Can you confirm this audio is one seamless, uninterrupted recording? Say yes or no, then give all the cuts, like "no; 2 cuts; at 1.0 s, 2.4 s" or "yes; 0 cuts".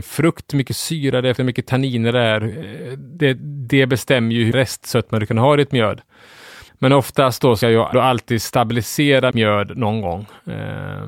no; 6 cuts; at 1.3 s, 4.5 s, 6.7 s, 7.6 s, 7.9 s, 9.3 s